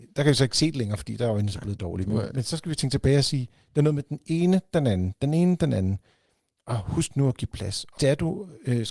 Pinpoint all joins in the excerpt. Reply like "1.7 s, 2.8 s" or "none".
8.0 s

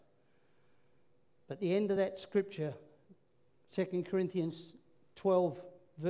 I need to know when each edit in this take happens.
none

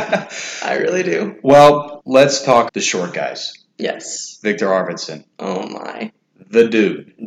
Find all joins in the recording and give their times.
2.0 s, 2.7 s, 5.3 s

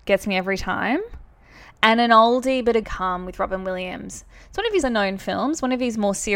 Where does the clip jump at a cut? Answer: 2.8 s, 4.8 s

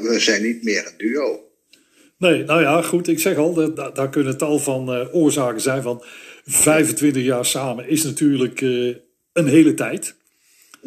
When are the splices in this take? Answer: 3.7 s

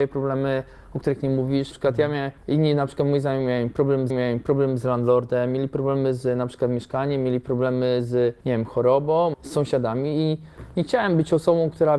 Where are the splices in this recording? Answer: 1.7 s, 2.4 s, 4.1 s, 8.4 s, 9.3 s

